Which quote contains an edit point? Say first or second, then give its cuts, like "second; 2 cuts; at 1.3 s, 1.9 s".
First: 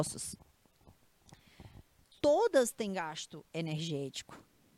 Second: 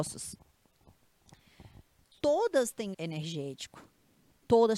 second; 1 cut; at 2.9 s